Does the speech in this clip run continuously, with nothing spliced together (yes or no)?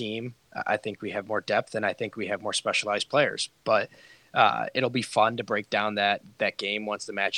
yes